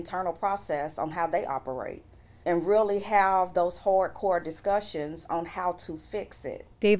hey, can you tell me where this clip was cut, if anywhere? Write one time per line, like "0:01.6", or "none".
none